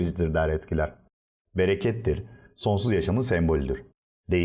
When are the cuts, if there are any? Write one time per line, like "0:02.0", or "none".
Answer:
none